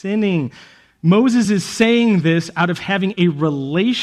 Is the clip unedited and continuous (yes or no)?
yes